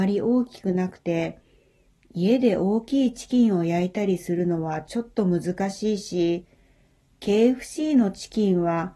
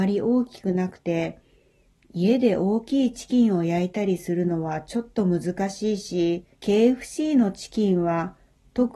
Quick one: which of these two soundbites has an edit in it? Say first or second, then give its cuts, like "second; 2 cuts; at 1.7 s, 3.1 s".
second; 1 cut; at 6.5 s